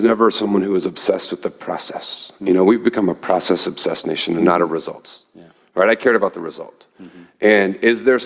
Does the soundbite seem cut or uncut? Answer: uncut